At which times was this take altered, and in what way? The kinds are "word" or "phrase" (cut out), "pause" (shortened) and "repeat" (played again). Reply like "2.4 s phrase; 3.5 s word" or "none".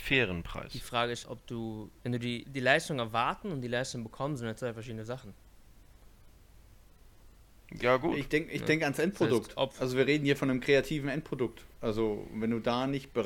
1.2 s word; 2.0 s pause; 2.4 s word; 11.7 s pause